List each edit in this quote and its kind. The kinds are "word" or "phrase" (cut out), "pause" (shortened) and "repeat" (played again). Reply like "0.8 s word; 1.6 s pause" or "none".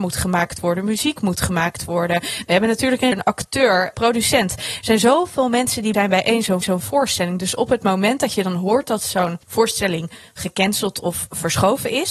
3.1 s word; 3.9 s word; 5.9 s word; 6.6 s repeat; 9.4 s pause